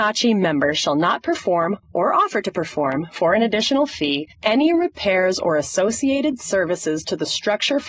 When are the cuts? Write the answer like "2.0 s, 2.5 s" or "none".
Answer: 1.8 s, 4.3 s